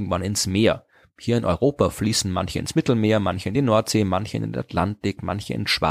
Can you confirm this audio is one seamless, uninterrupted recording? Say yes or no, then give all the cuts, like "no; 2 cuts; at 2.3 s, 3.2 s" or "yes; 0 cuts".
yes; 0 cuts